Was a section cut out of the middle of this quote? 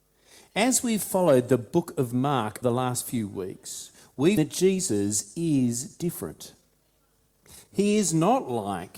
yes; 2 cuts; at 2.6 s, 4.4 s

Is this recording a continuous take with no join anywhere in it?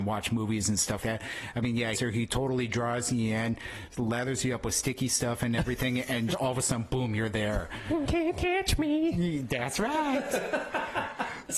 no; 3 cuts; at 1.0 s, 1.9 s, 6.3 s

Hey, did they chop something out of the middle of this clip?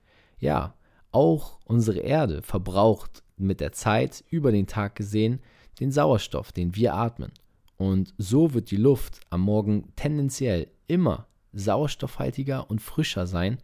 no; 0 cuts

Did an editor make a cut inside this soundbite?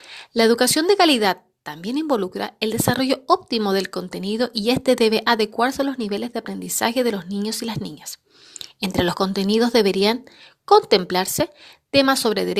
no; 0 cuts

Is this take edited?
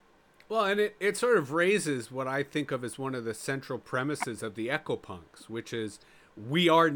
no; 0 cuts

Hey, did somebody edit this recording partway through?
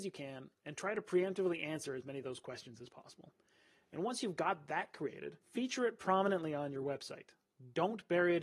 yes; 1 cut; at 5.4 s

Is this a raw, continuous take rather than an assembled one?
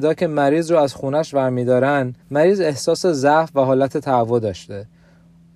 no; 1 cut; at 2.2 s

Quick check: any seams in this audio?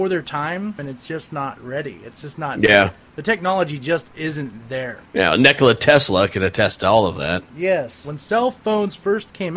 no; 0 cuts

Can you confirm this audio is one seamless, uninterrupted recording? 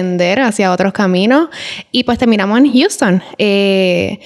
yes; 0 cuts

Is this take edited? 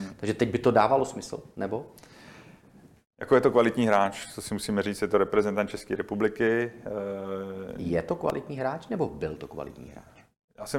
no; 0 cuts

